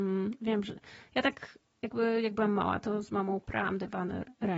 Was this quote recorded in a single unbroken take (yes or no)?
yes